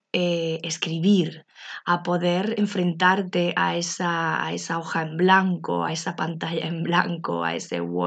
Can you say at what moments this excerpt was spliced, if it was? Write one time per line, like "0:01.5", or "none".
none